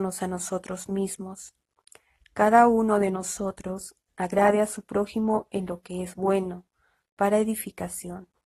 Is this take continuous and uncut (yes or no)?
yes